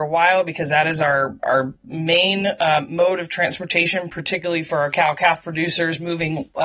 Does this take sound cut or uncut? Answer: uncut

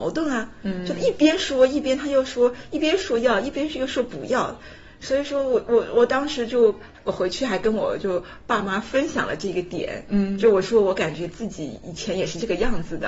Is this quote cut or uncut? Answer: uncut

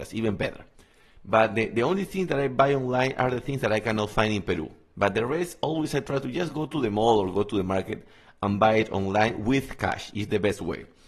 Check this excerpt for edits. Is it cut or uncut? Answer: uncut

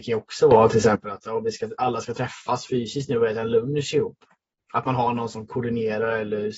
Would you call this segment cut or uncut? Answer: uncut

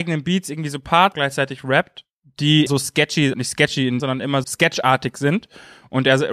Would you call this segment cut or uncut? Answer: cut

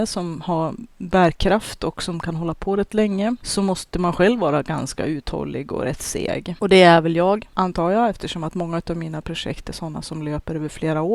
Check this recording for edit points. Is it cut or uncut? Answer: uncut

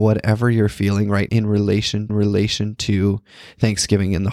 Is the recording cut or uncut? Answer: cut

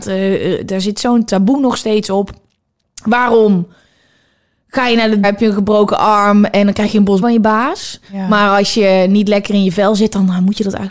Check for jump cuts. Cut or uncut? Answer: cut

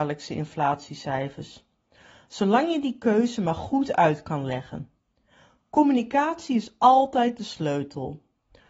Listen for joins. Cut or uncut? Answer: uncut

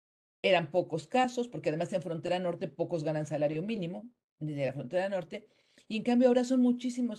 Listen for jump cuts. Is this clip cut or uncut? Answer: uncut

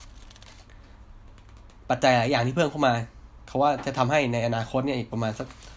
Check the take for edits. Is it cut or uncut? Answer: uncut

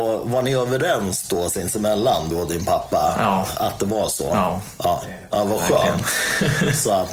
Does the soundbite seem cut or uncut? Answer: cut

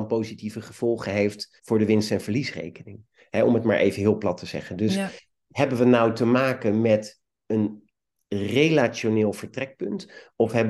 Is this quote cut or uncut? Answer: cut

